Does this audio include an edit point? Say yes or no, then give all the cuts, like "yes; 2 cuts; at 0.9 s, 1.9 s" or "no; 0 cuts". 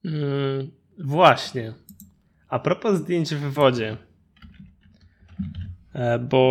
no; 0 cuts